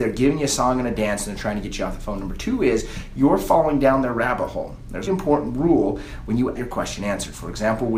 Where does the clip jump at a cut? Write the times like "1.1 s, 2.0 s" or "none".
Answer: 5.1 s, 6.6 s